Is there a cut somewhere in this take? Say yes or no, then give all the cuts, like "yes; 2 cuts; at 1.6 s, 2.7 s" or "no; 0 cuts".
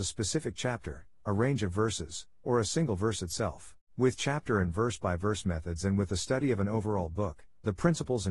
yes; 1 cut; at 3.8 s